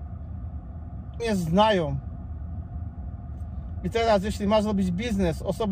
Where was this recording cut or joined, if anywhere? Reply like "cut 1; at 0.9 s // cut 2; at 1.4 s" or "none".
cut 1; at 1.2 s